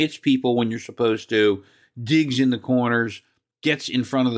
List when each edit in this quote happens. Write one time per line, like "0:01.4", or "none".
none